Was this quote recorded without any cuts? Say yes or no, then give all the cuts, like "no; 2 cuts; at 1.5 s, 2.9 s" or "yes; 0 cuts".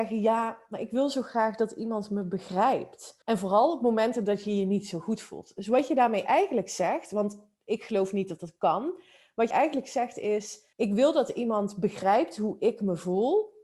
no; 3 cuts; at 3.2 s, 9.5 s, 10.7 s